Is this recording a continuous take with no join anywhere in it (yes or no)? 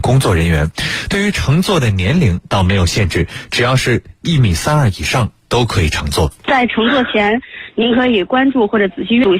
no